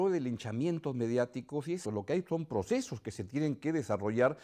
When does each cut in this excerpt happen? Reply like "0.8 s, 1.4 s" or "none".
1.8 s